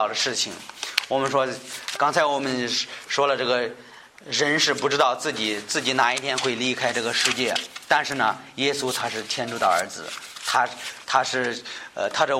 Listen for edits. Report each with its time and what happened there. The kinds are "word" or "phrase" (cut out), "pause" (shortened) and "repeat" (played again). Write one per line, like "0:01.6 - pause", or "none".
0:01.9 - word